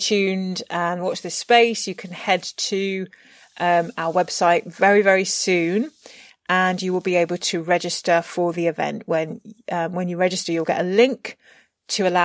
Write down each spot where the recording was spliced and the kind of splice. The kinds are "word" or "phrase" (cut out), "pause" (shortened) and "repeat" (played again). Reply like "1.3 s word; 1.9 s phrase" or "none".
none